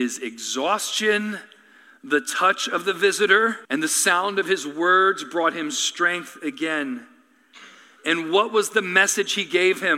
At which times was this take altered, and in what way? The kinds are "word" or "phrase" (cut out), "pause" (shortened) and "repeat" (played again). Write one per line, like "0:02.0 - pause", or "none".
0:03.6 - pause